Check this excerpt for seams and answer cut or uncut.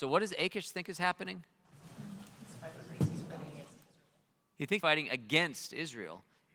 cut